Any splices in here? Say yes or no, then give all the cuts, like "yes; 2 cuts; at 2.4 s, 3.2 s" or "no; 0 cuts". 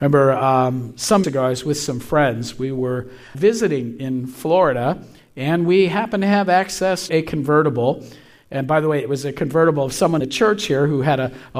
yes; 4 cuts; at 1.2 s, 3.3 s, 7.1 s, 10.2 s